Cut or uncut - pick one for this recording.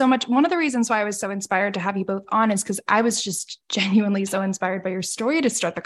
uncut